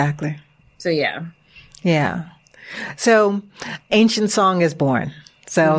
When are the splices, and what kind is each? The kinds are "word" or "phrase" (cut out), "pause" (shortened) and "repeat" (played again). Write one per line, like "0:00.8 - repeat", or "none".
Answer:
0:03.9 - word

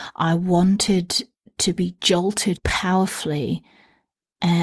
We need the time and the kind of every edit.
0:02.5 - word

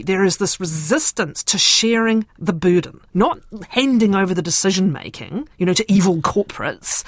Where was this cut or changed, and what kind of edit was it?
0:05.5 - pause

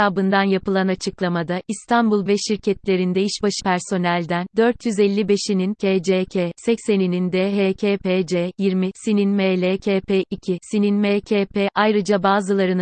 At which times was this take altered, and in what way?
0:02.3 - phrase
0:03.6 - word
0:05.7 - word

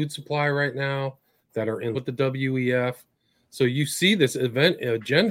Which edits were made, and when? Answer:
0:01.9 - word

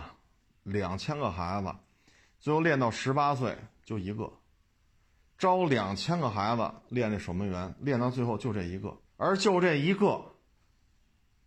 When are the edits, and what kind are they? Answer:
0:09.1 - pause

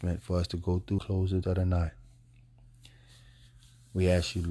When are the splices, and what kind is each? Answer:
0:01.0 - word
0:01.4 - word

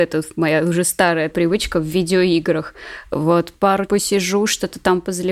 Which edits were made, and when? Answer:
0:01.3 - word
0:03.9 - word

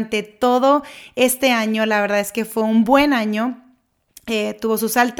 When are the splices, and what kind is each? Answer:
none

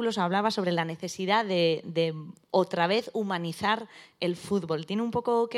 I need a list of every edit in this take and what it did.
none

